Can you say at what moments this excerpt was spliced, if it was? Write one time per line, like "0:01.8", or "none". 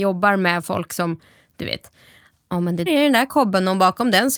0:02.9